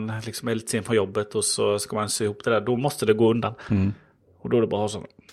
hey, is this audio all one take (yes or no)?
yes